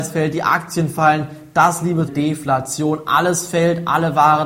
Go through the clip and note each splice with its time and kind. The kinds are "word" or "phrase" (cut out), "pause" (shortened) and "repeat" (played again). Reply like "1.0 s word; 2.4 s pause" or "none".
2.1 s phrase